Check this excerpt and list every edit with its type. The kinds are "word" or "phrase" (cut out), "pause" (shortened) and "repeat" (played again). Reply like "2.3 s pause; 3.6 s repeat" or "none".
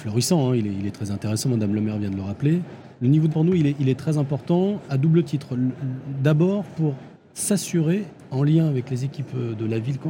2.9 s pause; 3.3 s word; 4.9 s word; 7.1 s pause